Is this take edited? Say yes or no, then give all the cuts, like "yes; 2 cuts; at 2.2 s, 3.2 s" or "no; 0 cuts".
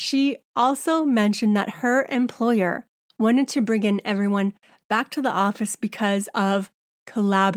no; 0 cuts